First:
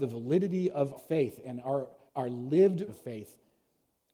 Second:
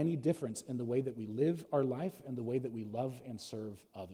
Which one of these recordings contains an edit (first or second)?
first